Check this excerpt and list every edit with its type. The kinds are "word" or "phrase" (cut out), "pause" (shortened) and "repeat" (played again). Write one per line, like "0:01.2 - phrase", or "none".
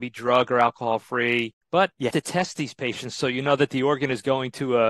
0:01.6 - pause
0:02.1 - word